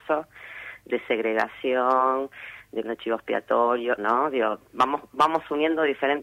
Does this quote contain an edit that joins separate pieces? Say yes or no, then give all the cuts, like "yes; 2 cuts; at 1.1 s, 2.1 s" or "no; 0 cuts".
yes; 2 cuts; at 2.8 s, 4.0 s